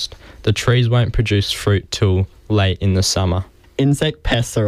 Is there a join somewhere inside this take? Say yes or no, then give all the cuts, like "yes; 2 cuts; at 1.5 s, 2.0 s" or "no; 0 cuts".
no; 0 cuts